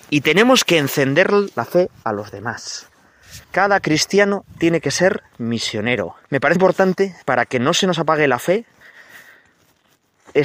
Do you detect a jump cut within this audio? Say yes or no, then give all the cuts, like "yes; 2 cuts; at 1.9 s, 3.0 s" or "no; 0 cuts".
yes; 4 cuts; at 3.4 s, 6.2 s, 6.6 s, 7.2 s